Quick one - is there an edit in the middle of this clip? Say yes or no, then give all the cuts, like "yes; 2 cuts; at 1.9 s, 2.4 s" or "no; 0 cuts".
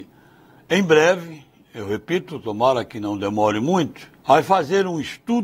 yes; 1 cut; at 4.2 s